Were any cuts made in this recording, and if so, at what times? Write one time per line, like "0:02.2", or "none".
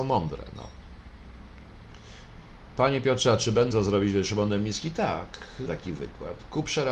0:03.7
0:05.7